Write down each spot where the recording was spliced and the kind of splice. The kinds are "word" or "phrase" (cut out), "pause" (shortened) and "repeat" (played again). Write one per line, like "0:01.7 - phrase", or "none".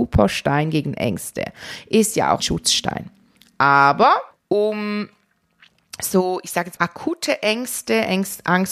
0:02.4 - word
0:04.3 - pause
0:06.8 - word